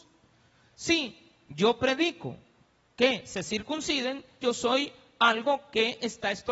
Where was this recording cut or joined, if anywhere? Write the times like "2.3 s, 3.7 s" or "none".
4.4 s